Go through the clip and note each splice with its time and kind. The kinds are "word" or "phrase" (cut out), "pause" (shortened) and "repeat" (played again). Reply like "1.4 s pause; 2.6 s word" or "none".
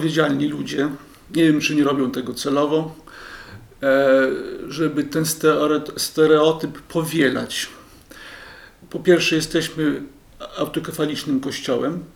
none